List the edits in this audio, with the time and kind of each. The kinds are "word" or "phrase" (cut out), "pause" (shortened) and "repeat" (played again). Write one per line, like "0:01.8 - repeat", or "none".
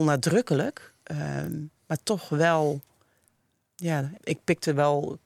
0:04.1 - word